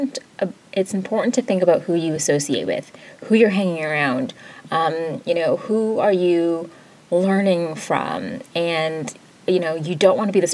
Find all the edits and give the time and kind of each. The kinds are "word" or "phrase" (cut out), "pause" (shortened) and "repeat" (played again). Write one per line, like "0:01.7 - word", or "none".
none